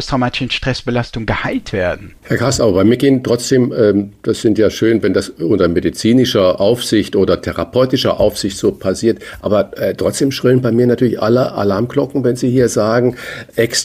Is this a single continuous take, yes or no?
no